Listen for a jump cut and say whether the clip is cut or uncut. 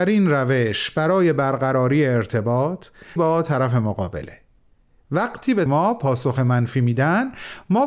cut